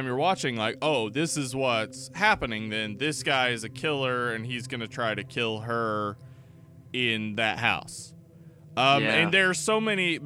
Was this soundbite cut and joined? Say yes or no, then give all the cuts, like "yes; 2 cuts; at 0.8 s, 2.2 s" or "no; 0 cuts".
no; 0 cuts